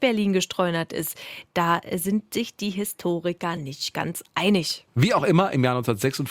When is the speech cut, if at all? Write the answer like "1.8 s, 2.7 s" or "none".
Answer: none